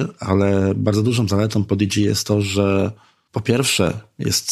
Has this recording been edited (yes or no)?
no